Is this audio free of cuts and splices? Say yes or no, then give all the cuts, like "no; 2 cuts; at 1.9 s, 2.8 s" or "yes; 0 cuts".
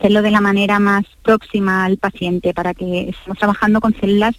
yes; 0 cuts